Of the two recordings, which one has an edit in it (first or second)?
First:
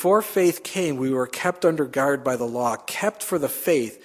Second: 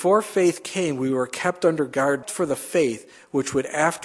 second